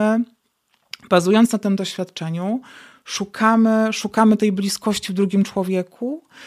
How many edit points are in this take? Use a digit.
0